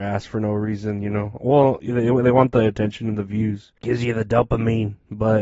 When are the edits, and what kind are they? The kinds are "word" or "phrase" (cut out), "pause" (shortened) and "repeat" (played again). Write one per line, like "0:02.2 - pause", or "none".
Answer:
0:03.8 - pause